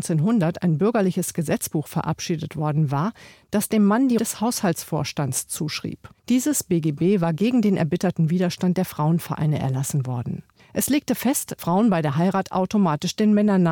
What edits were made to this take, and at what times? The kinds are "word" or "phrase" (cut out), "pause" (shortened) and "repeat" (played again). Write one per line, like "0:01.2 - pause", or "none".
0:04.2 - word
0:06.2 - pause
0:10.6 - pause
0:11.6 - word